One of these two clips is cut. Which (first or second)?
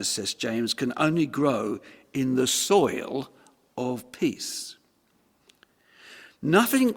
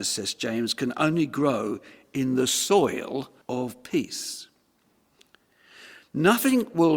second